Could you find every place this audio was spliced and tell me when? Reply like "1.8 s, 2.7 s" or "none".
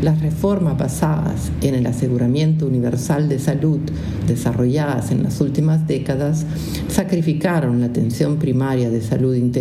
none